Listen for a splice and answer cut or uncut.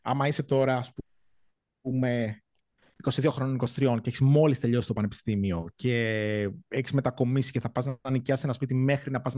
uncut